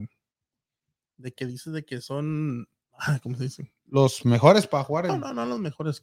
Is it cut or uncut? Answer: uncut